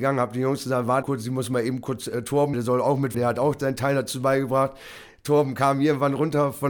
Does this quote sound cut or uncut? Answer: cut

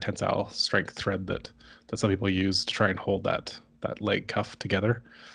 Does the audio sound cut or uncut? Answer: uncut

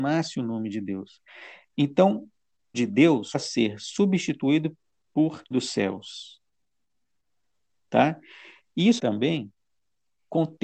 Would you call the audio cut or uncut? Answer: cut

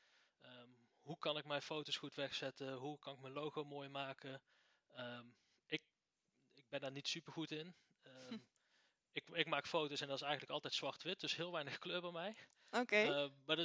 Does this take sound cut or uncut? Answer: uncut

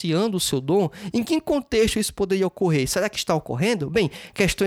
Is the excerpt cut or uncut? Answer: uncut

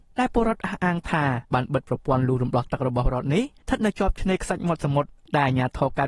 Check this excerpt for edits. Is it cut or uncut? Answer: cut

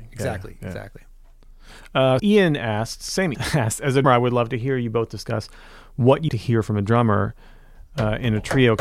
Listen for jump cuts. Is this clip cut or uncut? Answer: cut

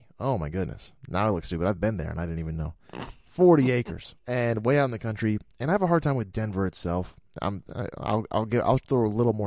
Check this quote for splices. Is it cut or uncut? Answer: cut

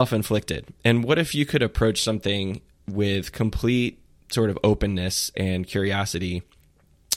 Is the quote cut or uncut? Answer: uncut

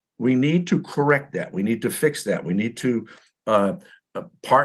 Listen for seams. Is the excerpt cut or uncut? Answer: uncut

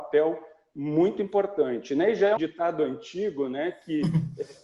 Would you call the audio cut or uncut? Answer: cut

